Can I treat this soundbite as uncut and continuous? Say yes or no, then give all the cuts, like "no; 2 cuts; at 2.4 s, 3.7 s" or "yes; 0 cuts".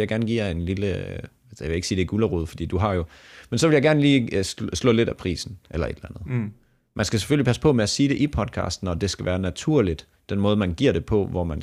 yes; 0 cuts